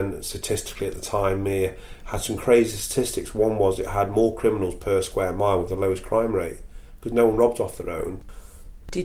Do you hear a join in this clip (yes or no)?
no